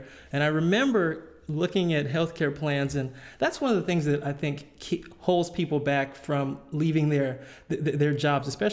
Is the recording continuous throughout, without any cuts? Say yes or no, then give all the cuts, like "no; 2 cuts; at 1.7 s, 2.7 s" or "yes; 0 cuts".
yes; 0 cuts